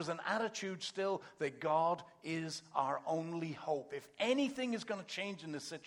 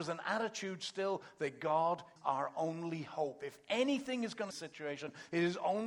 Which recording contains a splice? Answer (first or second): second